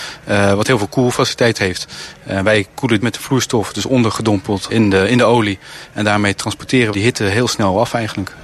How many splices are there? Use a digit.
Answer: 4